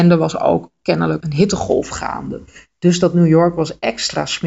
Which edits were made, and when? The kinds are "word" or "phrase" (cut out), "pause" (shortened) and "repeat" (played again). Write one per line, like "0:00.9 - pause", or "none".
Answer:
0:01.2 - word